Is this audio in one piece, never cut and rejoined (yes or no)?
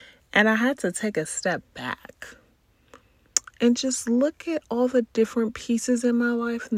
yes